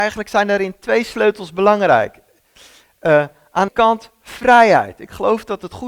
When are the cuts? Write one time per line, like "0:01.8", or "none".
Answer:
0:03.7